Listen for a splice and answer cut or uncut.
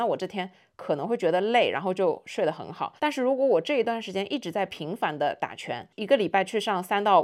cut